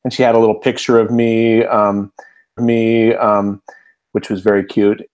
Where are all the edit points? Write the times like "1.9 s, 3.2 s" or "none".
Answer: 2.6 s